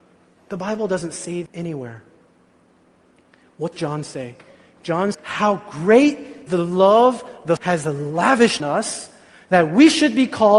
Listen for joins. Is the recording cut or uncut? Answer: cut